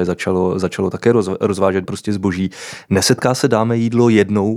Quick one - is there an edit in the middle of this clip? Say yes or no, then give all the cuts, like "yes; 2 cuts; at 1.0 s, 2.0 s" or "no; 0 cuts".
yes; 1 cut; at 1.8 s